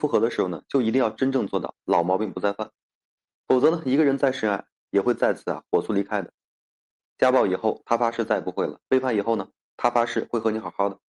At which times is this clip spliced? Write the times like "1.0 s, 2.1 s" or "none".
none